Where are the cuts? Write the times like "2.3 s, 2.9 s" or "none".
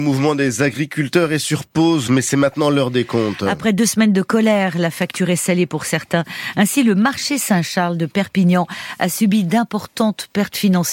2.1 s